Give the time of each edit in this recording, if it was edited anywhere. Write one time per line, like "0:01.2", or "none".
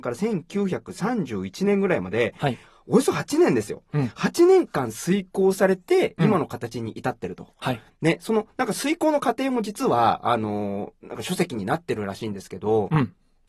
none